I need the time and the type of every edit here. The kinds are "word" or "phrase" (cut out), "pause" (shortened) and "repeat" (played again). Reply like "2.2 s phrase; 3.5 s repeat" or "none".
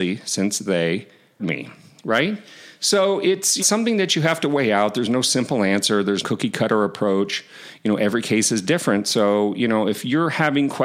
1.4 s word; 3.6 s phrase; 6.2 s word